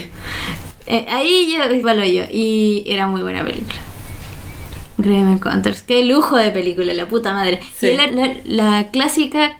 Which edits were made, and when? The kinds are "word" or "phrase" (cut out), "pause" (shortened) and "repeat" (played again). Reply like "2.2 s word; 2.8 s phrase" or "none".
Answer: 1.8 s phrase; 8.1 s word